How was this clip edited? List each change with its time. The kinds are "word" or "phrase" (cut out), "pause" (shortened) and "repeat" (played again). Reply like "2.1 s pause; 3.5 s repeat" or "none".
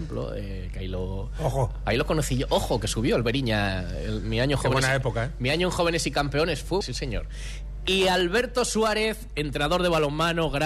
6.8 s word

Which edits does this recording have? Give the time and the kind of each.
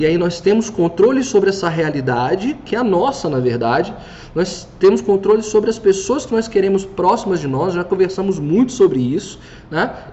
none

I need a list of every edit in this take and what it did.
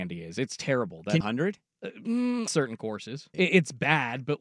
1.2 s phrase; 2.5 s word; 3.3 s word

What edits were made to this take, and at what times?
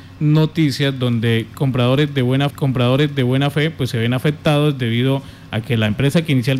2.5 s repeat

